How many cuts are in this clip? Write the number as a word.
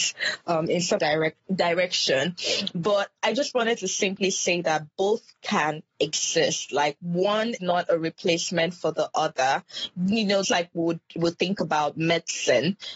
five